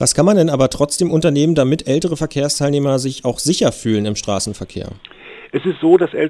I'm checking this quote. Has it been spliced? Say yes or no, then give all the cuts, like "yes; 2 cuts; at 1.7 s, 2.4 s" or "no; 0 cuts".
no; 0 cuts